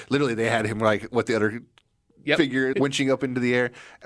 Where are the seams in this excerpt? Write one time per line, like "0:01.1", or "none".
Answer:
0:02.7